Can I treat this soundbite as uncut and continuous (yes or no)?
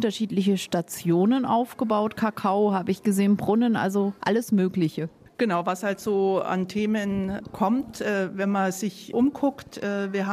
yes